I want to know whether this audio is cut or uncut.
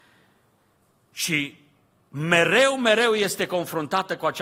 uncut